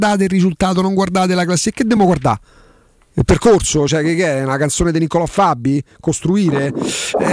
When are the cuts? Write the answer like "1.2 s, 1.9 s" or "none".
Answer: none